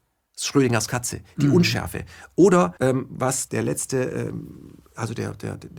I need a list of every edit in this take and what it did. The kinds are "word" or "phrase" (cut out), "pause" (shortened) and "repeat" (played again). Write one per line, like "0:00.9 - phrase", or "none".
0:02.8 - pause
0:03.5 - phrase

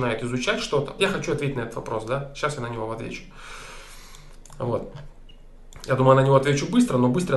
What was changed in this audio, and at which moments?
0:01.0 - word

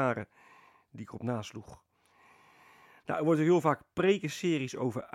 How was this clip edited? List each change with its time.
none

